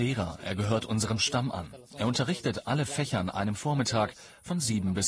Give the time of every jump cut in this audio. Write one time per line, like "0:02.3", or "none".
none